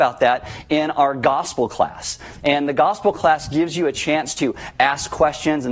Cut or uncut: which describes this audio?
uncut